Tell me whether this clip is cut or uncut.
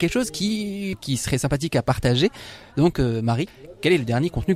uncut